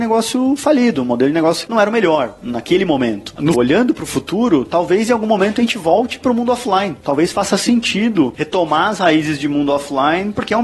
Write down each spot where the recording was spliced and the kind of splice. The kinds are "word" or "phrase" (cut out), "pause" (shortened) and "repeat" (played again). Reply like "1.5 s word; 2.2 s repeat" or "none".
1.7 s word; 3.5 s word